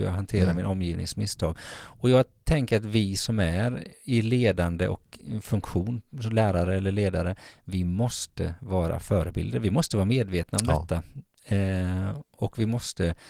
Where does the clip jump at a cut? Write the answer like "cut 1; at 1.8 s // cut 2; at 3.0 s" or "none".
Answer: none